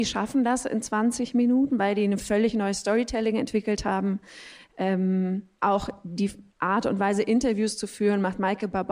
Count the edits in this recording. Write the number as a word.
two